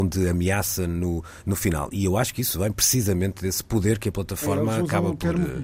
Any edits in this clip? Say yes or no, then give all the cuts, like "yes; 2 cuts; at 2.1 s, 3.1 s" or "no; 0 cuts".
no; 0 cuts